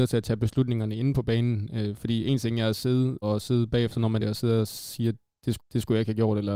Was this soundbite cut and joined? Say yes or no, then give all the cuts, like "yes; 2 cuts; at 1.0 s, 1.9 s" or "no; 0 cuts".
yes; 3 cuts; at 3.2 s, 4.2 s, 5.6 s